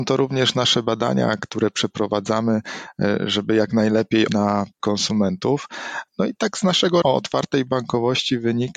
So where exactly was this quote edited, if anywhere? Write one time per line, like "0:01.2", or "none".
0:04.3
0:04.8
0:07.0